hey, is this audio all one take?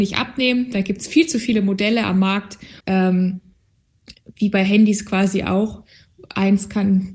no; 1 cut; at 2.8 s

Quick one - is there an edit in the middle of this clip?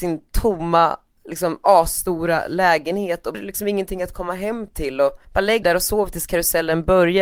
yes; 3 cuts; at 3.3 s, 5.2 s, 5.6 s

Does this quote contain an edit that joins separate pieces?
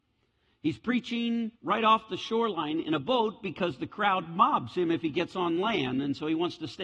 yes; 1 cut; at 1.5 s

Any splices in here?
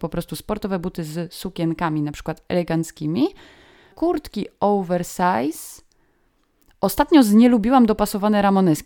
no; 0 cuts

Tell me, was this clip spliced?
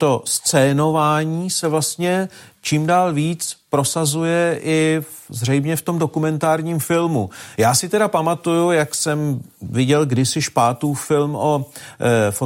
no; 0 cuts

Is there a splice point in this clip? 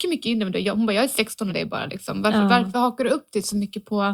yes; 2 cuts; at 1.5 s, 2.7 s

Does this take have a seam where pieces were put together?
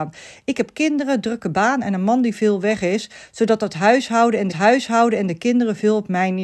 yes; 1 cut; at 4.5 s

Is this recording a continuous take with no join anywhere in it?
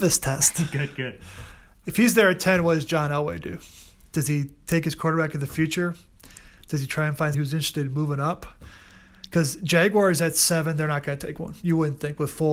no; 1 cut; at 7.3 s

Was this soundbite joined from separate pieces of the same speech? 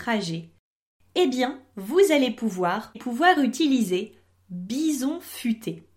yes; 1 cut; at 2.9 s

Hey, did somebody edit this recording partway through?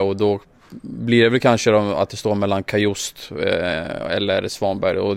no; 0 cuts

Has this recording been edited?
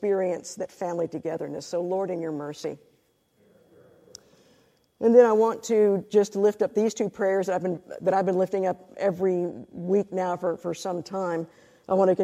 no; 0 cuts

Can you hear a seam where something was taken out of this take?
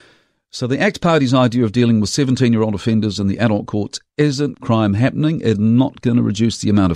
yes; 2 cuts; at 4.5 s, 5.5 s

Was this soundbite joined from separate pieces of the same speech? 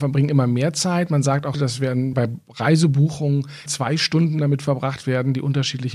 yes; 3 cuts; at 1.5 s, 2.1 s, 3.7 s

